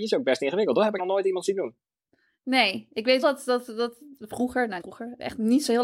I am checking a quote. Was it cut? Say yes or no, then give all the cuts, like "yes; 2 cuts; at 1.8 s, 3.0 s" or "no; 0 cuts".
yes; 3 cuts; at 1.0 s, 3.2 s, 4.8 s